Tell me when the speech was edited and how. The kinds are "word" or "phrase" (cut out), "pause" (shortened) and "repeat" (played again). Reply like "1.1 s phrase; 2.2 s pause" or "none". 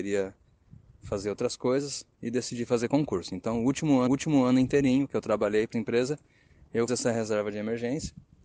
4.1 s repeat; 5.7 s word; 6.9 s word